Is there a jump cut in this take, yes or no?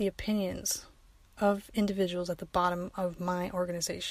no